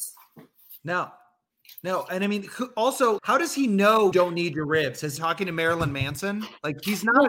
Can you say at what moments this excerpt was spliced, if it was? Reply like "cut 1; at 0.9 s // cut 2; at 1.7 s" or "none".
cut 1; at 3.2 s // cut 2; at 4.1 s // cut 3; at 5.2 s